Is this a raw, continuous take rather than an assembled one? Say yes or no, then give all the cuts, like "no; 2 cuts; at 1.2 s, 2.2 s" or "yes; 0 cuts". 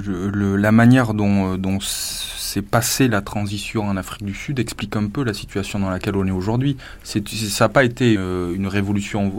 no; 1 cut; at 8.2 s